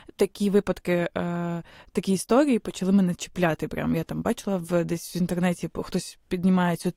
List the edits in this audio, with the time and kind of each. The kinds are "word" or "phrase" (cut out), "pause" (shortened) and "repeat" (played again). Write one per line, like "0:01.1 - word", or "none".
none